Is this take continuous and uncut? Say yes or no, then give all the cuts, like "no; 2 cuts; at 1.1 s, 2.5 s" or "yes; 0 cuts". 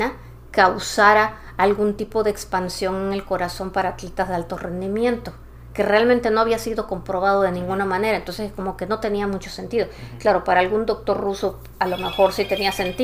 yes; 0 cuts